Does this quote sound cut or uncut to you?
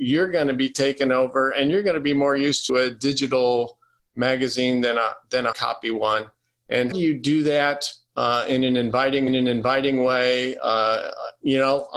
cut